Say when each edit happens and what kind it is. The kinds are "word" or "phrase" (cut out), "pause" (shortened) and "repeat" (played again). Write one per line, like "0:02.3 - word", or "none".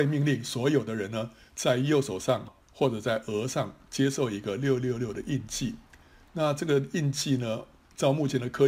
0:02.6 - pause